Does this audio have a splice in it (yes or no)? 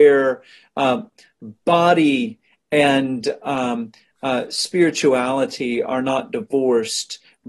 no